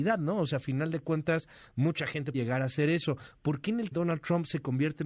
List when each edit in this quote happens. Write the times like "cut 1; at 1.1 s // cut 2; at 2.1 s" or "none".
cut 1; at 2.3 s // cut 2; at 3.9 s